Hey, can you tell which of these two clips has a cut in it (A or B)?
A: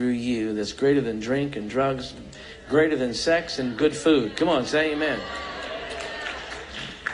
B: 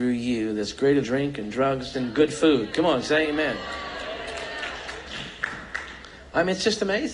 B